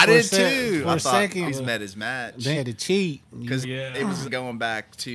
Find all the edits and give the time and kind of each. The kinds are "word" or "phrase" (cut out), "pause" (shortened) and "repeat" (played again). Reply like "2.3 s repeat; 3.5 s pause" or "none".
1.5 s word; 2.5 s word; 3.6 s word; 4.2 s word